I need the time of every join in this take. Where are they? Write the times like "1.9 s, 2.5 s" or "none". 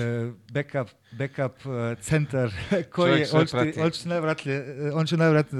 none